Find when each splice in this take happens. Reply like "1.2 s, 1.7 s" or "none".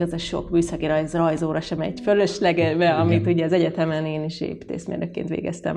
none